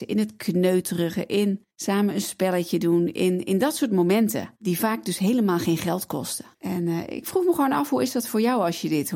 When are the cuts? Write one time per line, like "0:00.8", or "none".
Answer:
0:01.7
0:06.5